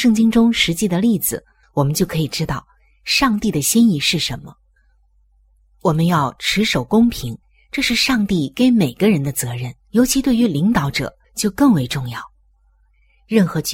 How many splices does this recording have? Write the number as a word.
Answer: four